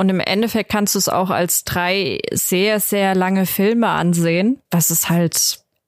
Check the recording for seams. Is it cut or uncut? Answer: cut